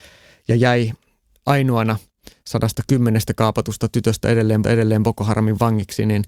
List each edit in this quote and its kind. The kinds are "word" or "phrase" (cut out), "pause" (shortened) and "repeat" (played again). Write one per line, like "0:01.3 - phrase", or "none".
0:04.6 - repeat

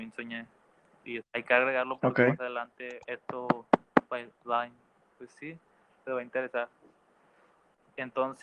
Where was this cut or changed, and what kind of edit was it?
0:01.2 - word
0:03.0 - pause
0:04.4 - word

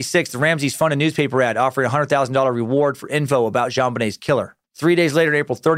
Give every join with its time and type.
0:04.6 - pause

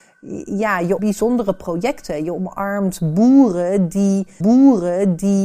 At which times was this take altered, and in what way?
0:01.0 - word
0:04.4 - repeat

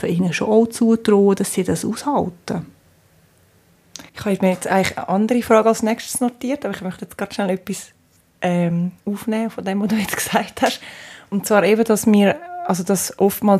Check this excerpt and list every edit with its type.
0:04.1 - pause
0:09.0 - pause

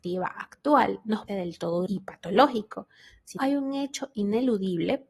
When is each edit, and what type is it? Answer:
0:01.3 - word
0:01.9 - word
0:03.4 - word

